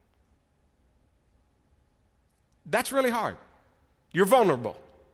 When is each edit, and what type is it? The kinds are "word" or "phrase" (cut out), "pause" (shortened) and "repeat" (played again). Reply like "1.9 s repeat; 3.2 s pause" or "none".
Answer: none